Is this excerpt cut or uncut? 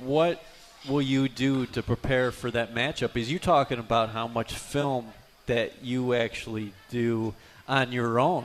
uncut